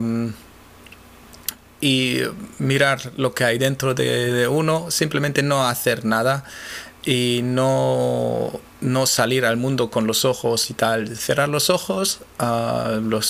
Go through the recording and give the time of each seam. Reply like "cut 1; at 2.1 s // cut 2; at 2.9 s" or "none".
none